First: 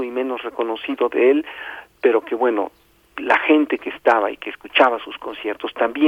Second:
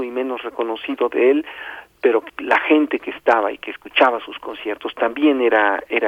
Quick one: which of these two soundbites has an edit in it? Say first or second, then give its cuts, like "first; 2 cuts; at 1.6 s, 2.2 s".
second; 1 cut; at 2.3 s